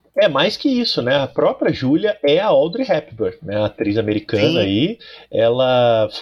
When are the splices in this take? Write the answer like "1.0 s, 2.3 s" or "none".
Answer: none